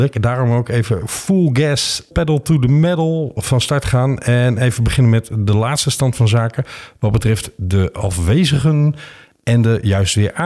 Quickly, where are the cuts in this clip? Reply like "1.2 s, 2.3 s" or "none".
none

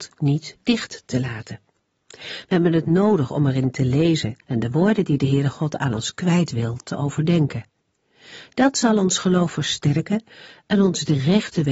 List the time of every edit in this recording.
4.4 s

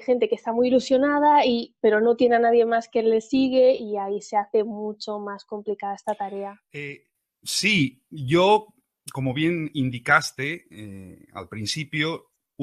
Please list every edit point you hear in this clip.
none

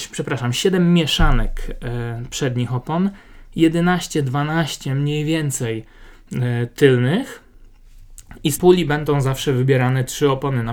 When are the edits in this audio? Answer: 8.6 s

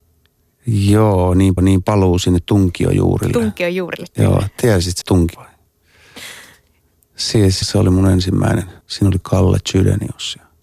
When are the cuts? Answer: 1.6 s, 5.0 s, 5.3 s, 7.6 s, 8.8 s, 9.2 s

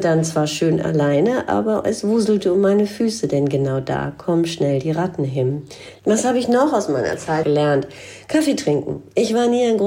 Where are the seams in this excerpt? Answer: 7.4 s

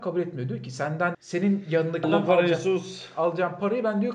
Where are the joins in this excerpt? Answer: 1.1 s, 2.0 s

